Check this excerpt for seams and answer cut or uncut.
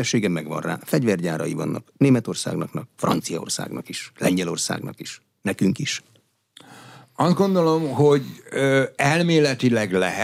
uncut